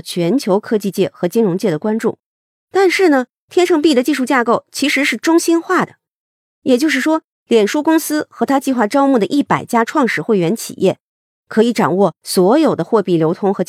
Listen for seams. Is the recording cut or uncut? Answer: uncut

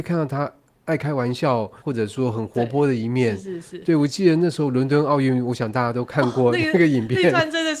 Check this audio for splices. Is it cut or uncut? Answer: cut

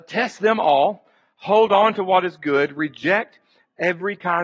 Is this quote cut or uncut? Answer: uncut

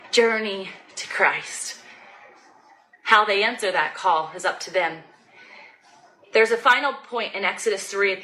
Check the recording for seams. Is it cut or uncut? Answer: uncut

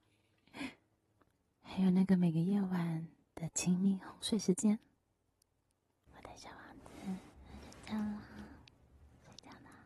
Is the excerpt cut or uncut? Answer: uncut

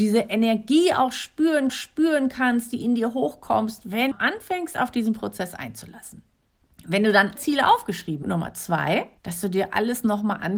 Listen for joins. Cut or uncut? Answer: cut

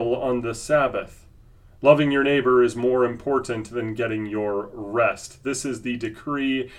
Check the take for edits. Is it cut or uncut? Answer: uncut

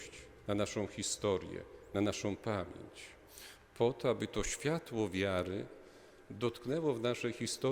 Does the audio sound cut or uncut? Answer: uncut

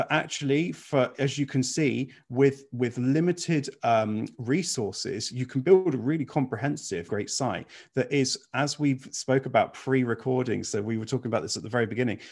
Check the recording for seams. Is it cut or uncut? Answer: cut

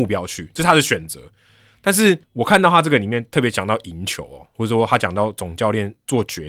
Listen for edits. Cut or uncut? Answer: uncut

